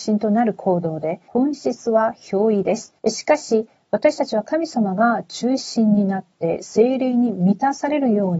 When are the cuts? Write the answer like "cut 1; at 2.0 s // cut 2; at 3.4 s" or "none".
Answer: cut 1; at 1.3 s // cut 2; at 3.0 s